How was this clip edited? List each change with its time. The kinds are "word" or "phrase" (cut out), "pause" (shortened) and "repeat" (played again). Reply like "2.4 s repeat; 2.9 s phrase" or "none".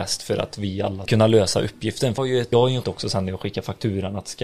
1.1 s word; 2.2 s word; 2.5 s word; 2.8 s word